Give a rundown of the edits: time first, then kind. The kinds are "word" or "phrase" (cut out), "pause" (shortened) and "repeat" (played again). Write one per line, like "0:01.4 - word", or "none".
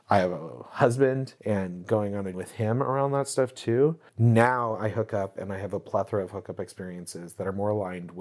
0:01.4 - pause
0:02.3 - word
0:04.1 - pause